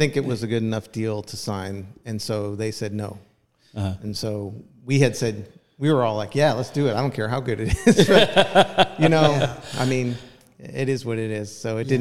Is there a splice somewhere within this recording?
no; 0 cuts

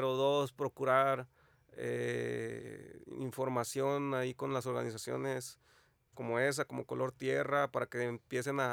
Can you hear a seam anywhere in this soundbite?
no; 0 cuts

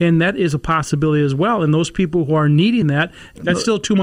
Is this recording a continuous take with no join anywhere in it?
yes; 0 cuts

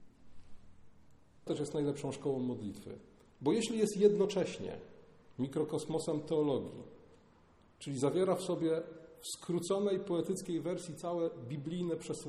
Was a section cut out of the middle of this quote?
yes; 1 cut; at 1.5 s

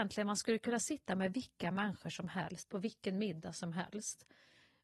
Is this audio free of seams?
yes; 0 cuts

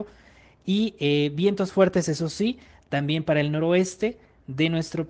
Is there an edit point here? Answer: no; 0 cuts

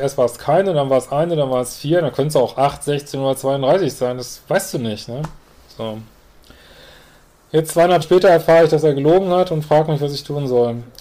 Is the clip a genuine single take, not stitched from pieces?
no; 1 cut; at 8.0 s

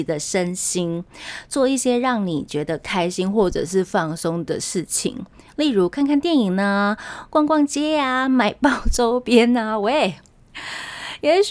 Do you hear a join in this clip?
no; 0 cuts

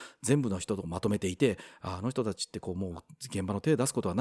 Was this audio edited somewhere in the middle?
no; 0 cuts

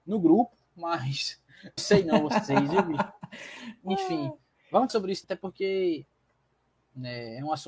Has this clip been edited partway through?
yes; 3 cuts; at 1.8 s, 4.9 s, 5.2 s

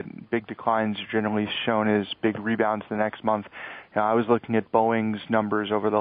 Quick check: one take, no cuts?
yes; 0 cuts

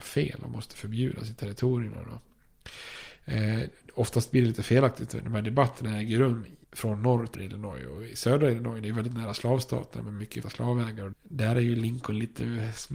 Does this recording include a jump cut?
yes; 4 cuts; at 6.6 s, 7.3 s, 10.4 s, 11.1 s

